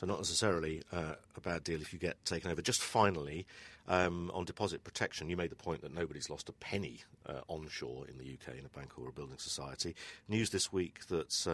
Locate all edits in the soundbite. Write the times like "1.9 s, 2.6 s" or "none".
none